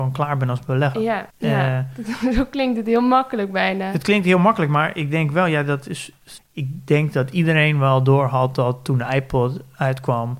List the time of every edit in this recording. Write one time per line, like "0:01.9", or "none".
0:01.3